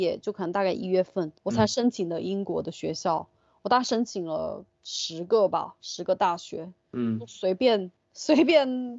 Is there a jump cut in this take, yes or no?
yes